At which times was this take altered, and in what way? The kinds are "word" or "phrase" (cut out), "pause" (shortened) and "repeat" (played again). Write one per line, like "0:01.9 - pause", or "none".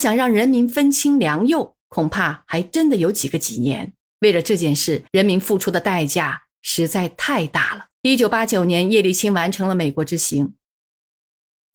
0:01.8 - pause
0:04.0 - pause
0:05.1 - pause
0:07.9 - pause